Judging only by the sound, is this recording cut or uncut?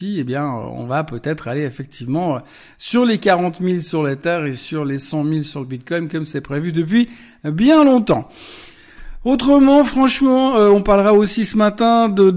uncut